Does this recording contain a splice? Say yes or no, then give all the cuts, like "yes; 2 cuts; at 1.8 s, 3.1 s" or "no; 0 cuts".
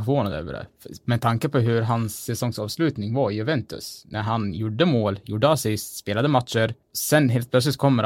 yes; 1 cut; at 6.8 s